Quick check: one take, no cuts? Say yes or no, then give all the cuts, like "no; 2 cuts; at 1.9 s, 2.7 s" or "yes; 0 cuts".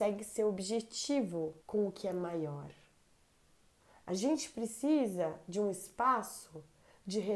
no; 1 cut; at 1.6 s